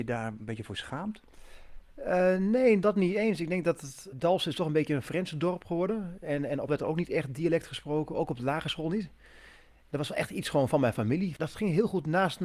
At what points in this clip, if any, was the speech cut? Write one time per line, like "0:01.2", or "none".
0:02.8
0:04.1
0:06.7